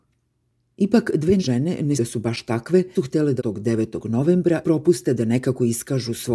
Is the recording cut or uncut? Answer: cut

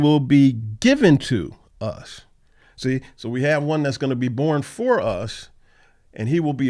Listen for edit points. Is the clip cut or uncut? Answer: uncut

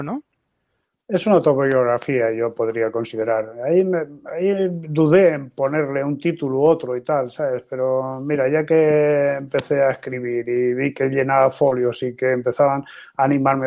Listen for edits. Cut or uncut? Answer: uncut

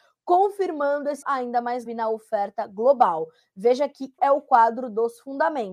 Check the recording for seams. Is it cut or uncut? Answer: cut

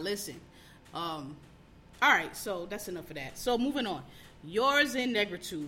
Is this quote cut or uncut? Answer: uncut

